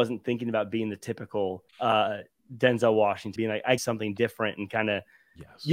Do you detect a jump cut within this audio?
yes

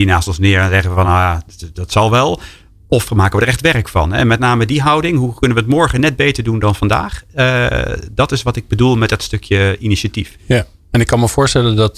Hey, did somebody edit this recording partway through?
no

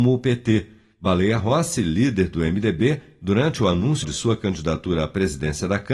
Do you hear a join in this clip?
yes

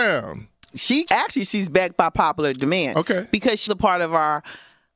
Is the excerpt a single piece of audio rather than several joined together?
no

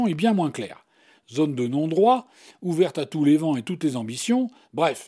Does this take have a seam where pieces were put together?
no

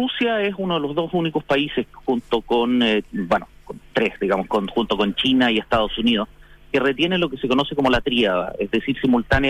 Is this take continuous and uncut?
yes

